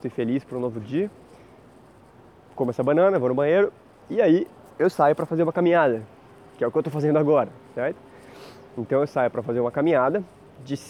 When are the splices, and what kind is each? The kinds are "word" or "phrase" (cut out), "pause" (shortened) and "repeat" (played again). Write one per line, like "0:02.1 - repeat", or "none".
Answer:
none